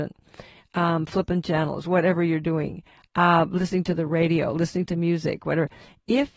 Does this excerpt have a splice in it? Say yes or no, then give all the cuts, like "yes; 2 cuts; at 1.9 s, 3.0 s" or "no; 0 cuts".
no; 0 cuts